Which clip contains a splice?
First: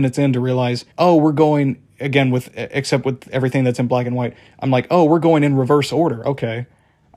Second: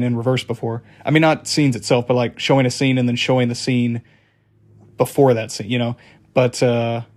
first; 1 cut; at 0.9 s

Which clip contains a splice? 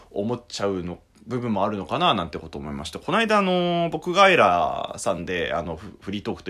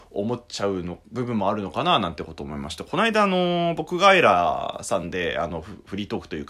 second; 1 cut; at 1.0 s

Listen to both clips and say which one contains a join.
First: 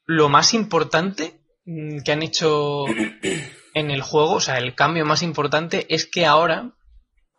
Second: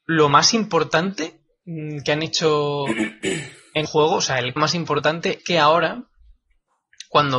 second; 3 cuts; at 3.9 s, 4.6 s, 5.4 s

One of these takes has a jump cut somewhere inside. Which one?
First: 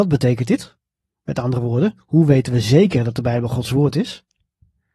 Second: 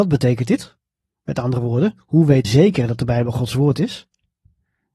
second; 1 cut; at 2.4 s

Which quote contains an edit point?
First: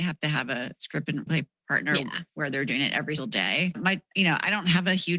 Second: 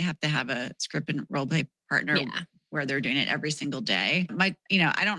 first; 3 cuts; at 1.3 s, 2.3 s, 3.2 s

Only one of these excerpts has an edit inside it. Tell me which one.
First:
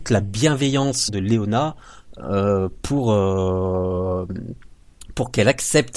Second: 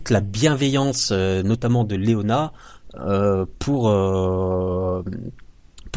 first; 1 cut; at 1.1 s

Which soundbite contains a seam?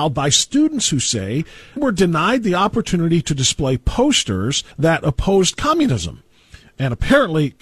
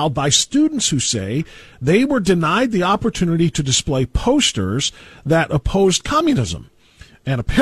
first; 2 cuts; at 1.8 s, 4.7 s

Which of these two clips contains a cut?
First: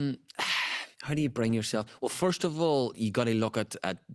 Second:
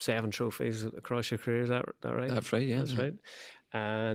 first; 1 cut; at 0.9 s

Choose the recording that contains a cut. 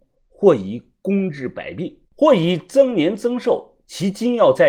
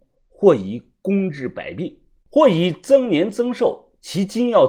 first; 1 cut; at 2.1 s

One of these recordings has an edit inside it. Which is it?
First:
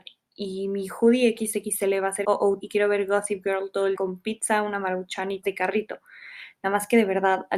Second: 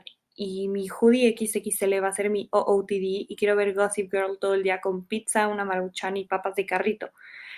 first; 4 cuts; at 2.2 s, 2.6 s, 3.9 s, 5.4 s

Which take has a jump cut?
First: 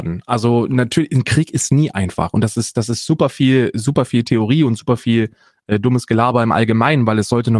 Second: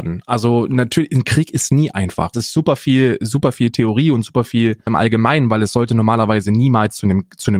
second; 2 cuts; at 2.3 s, 4.9 s

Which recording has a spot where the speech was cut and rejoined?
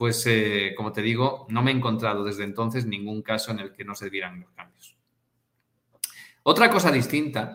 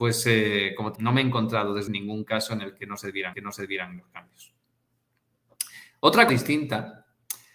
second; 4 cuts; at 1.0 s, 1.9 s, 3.3 s, 6.3 s

